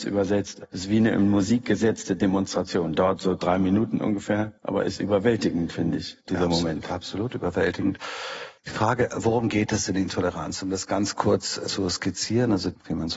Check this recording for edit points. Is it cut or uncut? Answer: cut